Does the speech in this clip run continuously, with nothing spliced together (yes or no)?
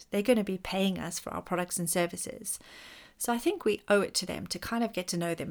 yes